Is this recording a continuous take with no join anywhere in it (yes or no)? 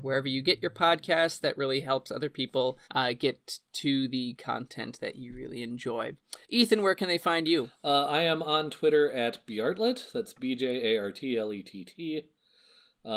no